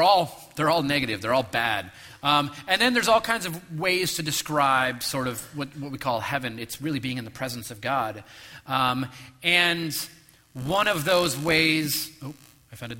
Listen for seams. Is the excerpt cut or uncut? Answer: uncut